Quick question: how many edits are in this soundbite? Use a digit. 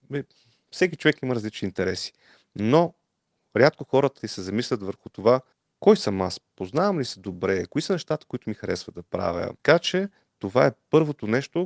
3